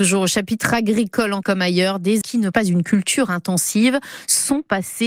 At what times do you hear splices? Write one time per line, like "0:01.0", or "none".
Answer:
0:01.4
0:02.2
0:02.5